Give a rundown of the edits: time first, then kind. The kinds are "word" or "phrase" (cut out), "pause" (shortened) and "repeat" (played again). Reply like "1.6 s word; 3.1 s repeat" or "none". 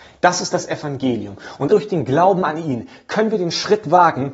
1.7 s word